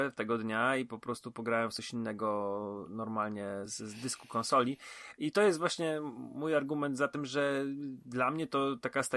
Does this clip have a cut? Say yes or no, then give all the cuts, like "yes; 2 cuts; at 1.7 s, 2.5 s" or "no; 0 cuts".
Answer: yes; 1 cut; at 3.7 s